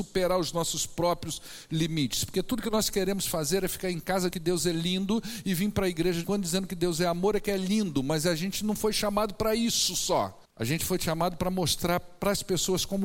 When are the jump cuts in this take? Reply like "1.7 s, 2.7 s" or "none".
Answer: 4.3 s, 6.2 s, 10.4 s

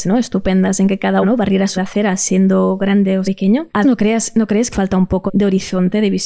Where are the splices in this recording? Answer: 1.2 s, 1.8 s, 3.2 s, 3.8 s, 4.7 s, 5.3 s

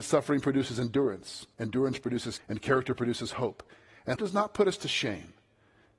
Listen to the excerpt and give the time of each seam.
1.5 s, 2.4 s, 4.2 s

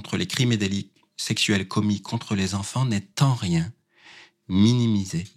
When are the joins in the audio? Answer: none

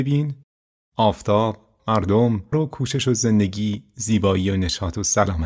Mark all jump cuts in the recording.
1.8 s, 2.5 s

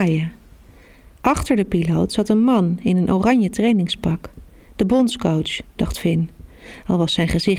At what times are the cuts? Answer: none

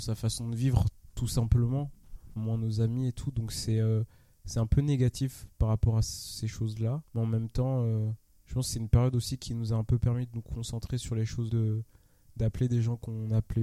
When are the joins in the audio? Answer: 2.4 s, 7.1 s, 8.4 s, 11.5 s

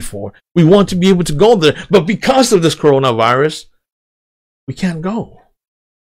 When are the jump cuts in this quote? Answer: none

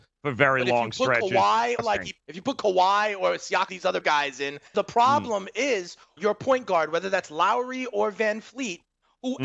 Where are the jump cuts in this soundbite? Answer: 1.8 s, 2.2 s, 3.7 s, 4.0 s, 4.7 s, 6.2 s

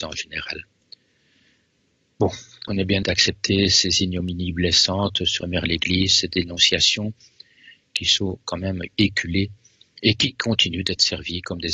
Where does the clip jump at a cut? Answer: 2.7 s, 3.0 s, 5.4 s

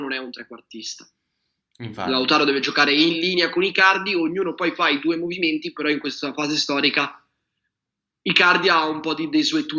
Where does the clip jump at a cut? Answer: none

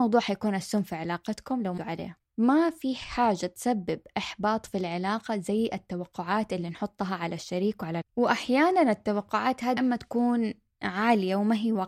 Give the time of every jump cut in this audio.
1.8 s, 8.0 s, 9.8 s

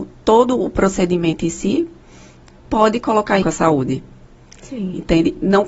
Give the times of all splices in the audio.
3.4 s

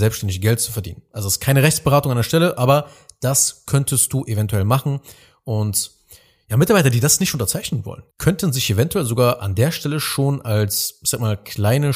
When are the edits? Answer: 8.1 s

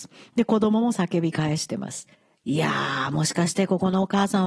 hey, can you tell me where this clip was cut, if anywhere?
2.1 s

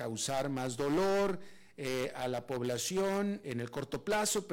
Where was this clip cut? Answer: 3.4 s

